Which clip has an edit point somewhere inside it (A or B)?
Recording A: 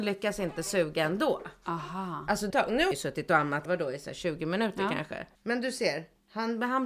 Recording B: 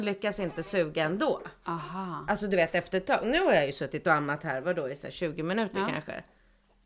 A